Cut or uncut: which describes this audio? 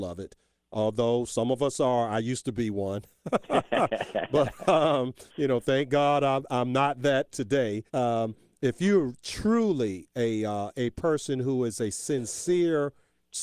cut